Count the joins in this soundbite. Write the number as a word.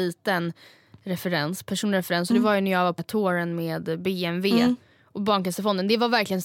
one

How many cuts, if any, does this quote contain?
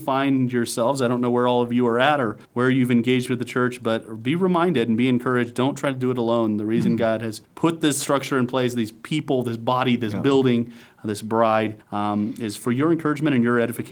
three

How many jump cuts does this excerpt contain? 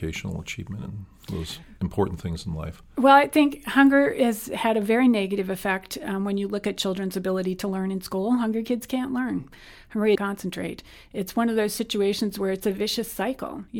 one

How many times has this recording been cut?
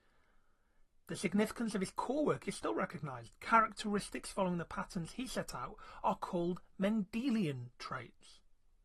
zero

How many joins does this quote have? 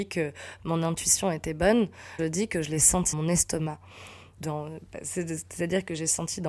two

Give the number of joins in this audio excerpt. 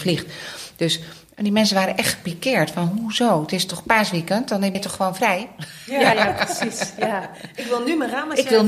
two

